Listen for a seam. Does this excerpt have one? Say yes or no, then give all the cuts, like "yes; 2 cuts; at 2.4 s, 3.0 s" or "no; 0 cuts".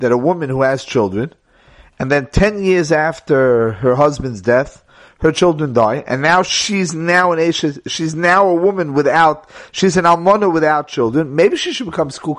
no; 0 cuts